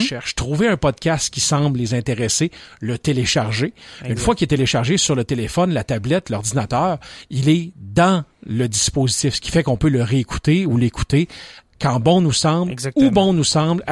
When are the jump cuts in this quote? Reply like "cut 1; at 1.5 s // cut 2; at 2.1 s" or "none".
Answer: none